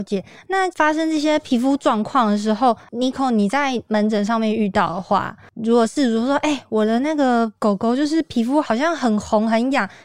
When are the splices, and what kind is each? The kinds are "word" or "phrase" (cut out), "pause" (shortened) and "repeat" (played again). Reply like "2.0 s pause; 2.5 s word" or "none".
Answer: none